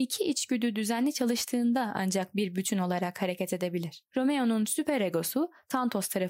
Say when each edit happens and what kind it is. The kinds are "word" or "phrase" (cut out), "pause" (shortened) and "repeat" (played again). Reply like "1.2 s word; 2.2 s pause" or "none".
4.1 s pause